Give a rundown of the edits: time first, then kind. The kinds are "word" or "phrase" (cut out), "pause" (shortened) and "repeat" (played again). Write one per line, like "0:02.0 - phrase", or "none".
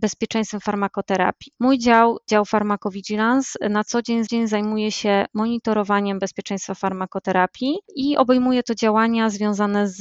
0:04.3 - repeat